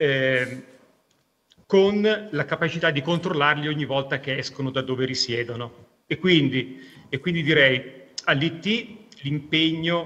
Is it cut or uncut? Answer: uncut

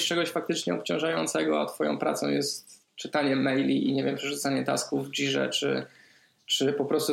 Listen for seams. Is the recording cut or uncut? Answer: uncut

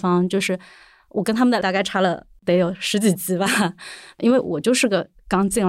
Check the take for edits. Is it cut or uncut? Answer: cut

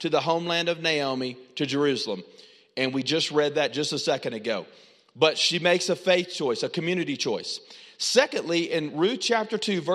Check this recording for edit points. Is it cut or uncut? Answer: uncut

